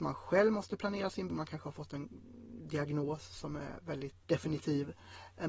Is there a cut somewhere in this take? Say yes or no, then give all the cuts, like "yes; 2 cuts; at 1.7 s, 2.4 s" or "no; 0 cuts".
yes; 2 cuts; at 1.3 s, 4.2 s